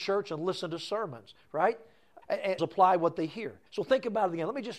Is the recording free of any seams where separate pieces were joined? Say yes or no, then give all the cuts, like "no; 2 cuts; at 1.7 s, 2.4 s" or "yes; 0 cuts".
no; 3 cuts; at 2.2 s, 2.6 s, 3.7 s